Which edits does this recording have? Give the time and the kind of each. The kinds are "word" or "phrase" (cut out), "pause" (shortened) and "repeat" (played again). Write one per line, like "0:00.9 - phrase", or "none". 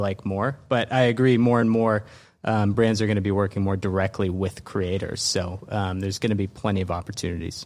none